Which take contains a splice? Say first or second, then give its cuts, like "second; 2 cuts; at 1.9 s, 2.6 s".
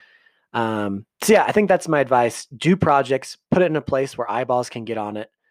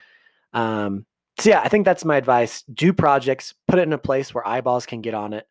first; 1 cut; at 1.1 s